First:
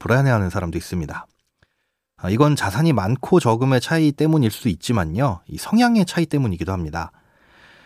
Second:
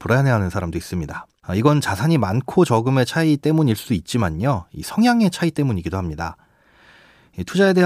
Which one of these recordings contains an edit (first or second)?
second